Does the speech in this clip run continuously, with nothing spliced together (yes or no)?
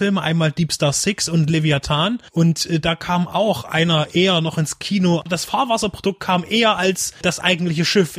yes